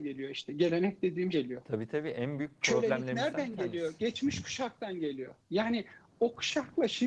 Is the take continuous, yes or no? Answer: no